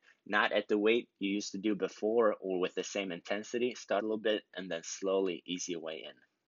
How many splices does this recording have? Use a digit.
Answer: 2